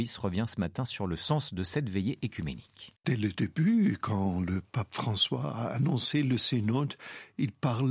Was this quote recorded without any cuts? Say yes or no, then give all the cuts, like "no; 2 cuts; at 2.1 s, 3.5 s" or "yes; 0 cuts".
no; 1 cut; at 3.0 s